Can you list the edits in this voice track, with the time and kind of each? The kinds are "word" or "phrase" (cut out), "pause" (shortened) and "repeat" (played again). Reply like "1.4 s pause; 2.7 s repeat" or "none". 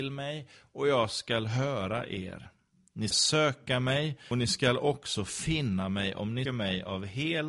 3.1 s word; 4.3 s word; 6.5 s word